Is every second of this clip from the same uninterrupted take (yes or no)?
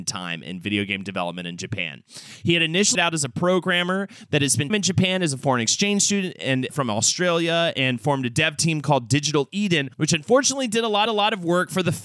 no